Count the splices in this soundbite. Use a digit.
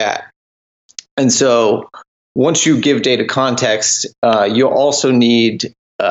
0